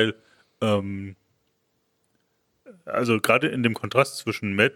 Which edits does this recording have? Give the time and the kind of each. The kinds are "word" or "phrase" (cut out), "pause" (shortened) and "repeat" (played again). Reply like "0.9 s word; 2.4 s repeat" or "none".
none